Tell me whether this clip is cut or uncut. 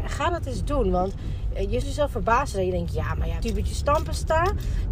cut